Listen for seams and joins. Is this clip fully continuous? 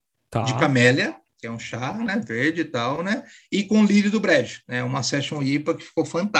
yes; 0 cuts

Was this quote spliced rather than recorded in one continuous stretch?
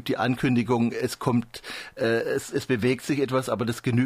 yes; 1 cut; at 2.5 s

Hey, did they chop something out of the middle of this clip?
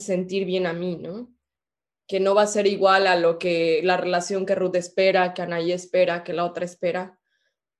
no; 0 cuts

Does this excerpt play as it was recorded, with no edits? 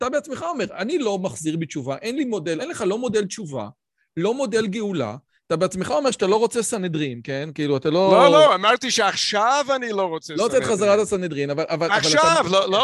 no; 1 cut; at 2.6 s

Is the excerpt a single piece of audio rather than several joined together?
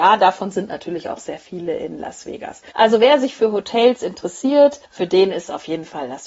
no; 2 cuts; at 2.7 s, 4.8 s

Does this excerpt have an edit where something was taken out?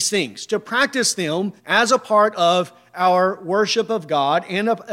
yes; 1 cut; at 1.6 s

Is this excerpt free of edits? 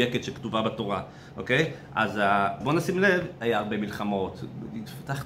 no; 1 cut; at 2.6 s

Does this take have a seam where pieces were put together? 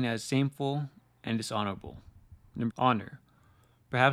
yes; 1 cut; at 2.7 s

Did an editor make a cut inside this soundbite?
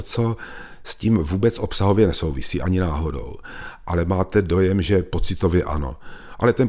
no; 0 cuts

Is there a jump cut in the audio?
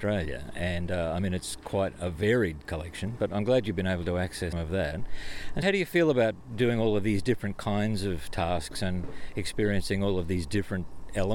yes; 2 cuts; at 4.5 s, 5.6 s

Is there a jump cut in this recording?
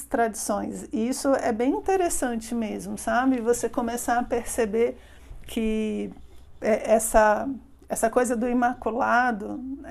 no; 0 cuts

